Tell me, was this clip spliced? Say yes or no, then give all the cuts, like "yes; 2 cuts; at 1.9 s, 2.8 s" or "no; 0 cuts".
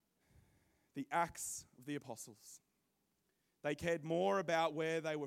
no; 0 cuts